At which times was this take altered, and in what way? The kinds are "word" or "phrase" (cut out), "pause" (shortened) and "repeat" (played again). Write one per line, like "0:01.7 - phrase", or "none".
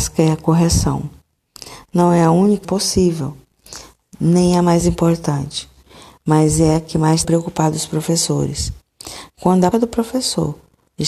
0:02.6 - word
0:07.2 - word
0:09.7 - word

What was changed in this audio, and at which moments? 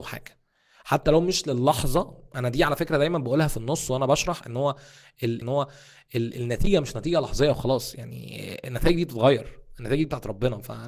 0:05.4 - repeat

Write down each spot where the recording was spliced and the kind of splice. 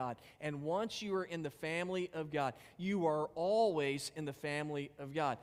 none

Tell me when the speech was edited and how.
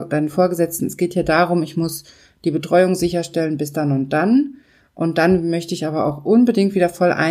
none

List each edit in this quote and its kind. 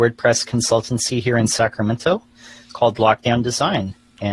none

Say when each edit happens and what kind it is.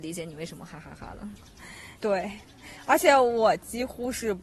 0:02.0 - pause

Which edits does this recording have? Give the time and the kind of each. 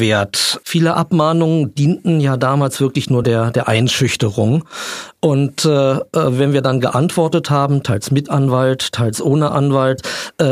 none

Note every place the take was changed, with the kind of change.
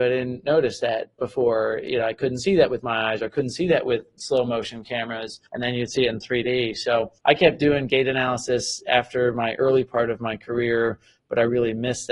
0:05.5 - pause
0:07.2 - pause

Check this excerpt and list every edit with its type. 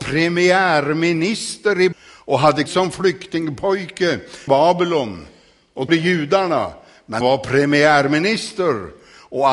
0:01.9 - word
0:02.7 - word
0:04.5 - word
0:05.9 - word
0:07.2 - word

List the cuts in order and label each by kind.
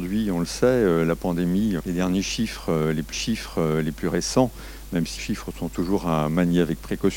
0:01.8 - word
0:03.1 - repeat
0:05.2 - word

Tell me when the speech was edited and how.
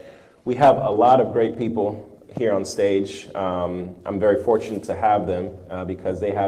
none

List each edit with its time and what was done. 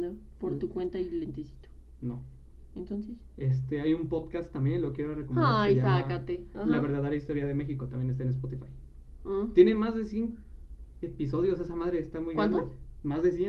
none

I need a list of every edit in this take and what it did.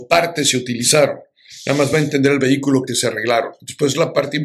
none

